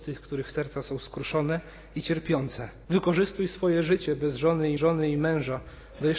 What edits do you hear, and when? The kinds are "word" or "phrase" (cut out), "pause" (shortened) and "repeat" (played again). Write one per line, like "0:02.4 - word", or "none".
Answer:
0:02.8 - pause
0:04.8 - repeat